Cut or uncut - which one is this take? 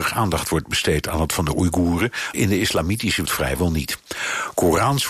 cut